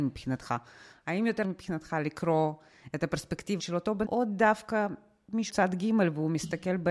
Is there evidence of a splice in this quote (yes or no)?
yes